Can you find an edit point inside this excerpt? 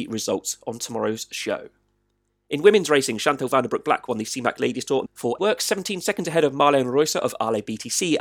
yes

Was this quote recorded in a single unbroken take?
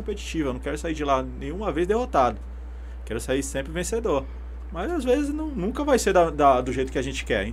yes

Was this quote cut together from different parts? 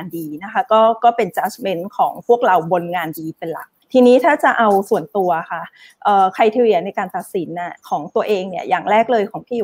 yes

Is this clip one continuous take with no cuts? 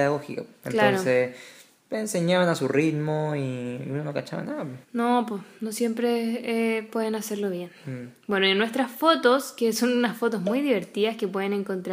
no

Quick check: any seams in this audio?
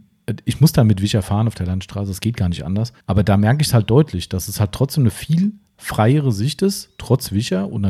yes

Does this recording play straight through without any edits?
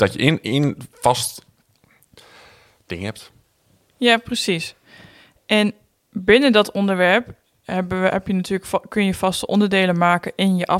yes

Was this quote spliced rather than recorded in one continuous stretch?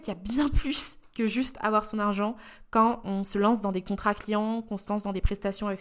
no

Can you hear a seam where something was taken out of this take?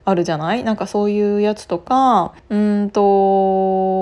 yes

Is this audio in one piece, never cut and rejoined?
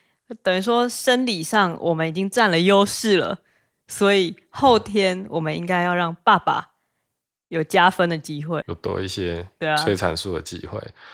no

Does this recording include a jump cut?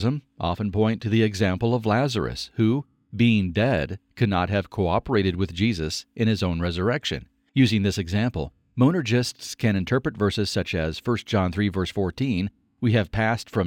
no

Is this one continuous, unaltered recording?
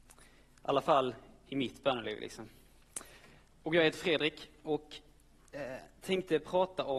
yes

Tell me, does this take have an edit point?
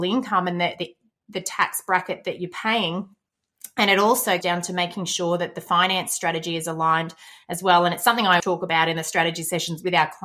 yes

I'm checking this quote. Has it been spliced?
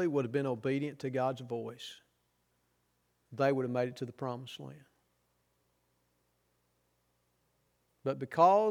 no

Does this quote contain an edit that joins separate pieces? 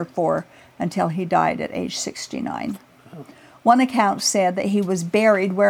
no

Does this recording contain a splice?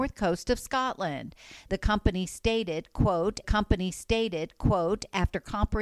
yes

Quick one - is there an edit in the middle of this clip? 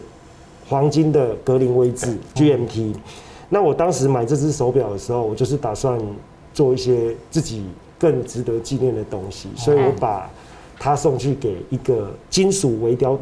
yes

